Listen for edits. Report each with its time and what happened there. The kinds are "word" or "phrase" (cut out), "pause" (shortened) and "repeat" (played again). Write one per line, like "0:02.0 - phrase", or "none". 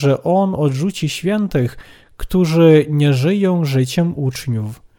none